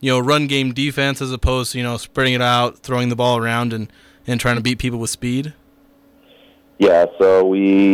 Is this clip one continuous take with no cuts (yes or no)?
yes